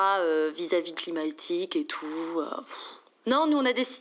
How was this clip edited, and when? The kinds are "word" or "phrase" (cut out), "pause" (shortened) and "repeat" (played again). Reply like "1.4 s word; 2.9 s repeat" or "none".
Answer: 0.9 s phrase